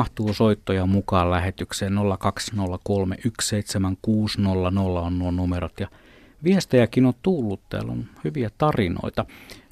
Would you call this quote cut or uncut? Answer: uncut